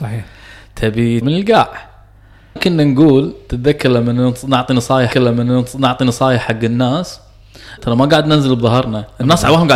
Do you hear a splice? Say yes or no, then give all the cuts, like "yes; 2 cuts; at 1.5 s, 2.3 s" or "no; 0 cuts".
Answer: yes; 4 cuts; at 1.2 s, 2.6 s, 5.1 s, 7.8 s